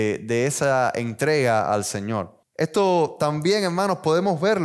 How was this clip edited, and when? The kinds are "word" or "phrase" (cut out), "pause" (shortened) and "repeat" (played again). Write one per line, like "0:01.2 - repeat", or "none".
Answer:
none